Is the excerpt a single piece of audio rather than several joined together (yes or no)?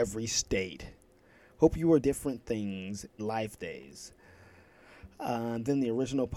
no